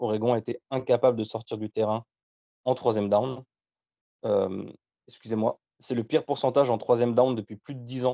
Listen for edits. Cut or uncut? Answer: cut